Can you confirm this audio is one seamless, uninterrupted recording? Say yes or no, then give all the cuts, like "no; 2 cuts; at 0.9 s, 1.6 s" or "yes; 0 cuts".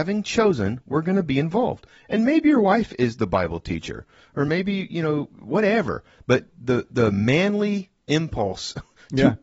yes; 0 cuts